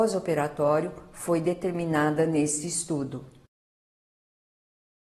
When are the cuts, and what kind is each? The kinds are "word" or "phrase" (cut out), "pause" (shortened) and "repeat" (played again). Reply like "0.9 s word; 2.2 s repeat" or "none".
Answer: none